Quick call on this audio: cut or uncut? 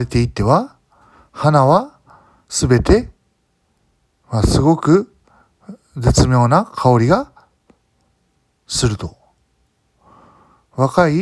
uncut